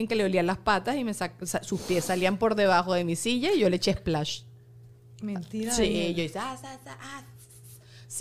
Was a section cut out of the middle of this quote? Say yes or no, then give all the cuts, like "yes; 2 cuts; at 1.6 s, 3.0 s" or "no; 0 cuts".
no; 0 cuts